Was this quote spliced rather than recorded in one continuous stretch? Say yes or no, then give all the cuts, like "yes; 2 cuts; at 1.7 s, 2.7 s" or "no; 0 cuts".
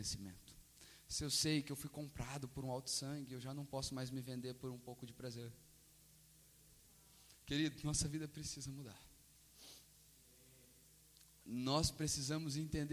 no; 0 cuts